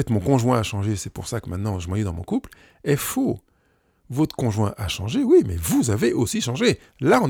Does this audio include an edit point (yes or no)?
no